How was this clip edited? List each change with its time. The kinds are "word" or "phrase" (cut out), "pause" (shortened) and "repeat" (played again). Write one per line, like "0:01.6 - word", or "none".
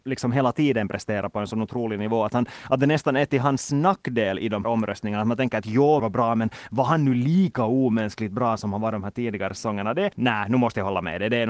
0:04.6 - word
0:06.0 - word
0:10.1 - word